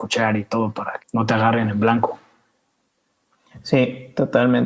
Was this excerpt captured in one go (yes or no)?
no